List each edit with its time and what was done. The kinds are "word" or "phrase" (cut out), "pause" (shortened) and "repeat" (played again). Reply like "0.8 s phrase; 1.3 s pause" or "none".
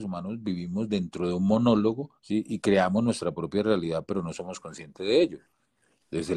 2.2 s pause